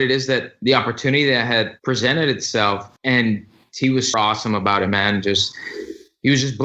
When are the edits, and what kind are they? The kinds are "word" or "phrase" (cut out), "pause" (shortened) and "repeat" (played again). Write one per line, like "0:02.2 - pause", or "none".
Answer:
0:03.0 - pause
0:04.1 - word